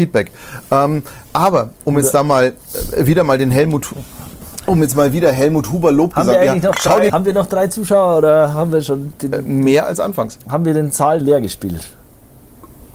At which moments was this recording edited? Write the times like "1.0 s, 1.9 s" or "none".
1.3 s, 7.1 s, 10.4 s, 11.2 s